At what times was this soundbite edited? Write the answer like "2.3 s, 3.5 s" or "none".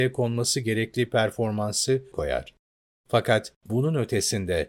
2.1 s, 3.6 s